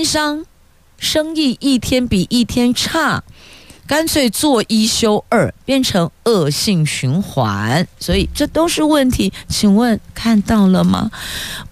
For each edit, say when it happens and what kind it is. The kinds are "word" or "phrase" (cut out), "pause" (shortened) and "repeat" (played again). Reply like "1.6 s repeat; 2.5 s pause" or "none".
none